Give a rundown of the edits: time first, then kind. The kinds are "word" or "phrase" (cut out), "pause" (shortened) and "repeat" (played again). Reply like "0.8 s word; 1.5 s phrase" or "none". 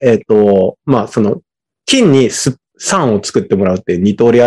none